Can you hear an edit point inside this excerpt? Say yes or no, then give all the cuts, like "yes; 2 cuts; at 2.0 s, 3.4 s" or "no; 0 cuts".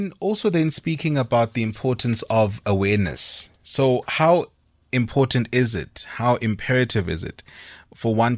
no; 0 cuts